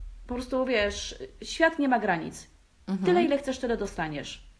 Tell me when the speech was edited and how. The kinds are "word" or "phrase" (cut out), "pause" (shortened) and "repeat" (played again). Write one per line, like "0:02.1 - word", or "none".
none